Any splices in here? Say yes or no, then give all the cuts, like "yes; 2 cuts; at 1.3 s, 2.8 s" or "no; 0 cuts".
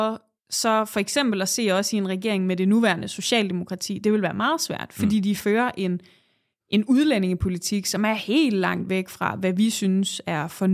no; 0 cuts